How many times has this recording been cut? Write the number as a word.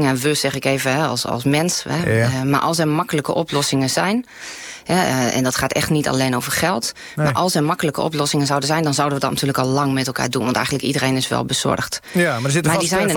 zero